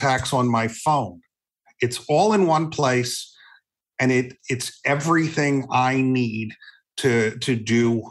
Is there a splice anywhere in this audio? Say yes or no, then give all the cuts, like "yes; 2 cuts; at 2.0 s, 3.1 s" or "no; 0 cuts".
no; 0 cuts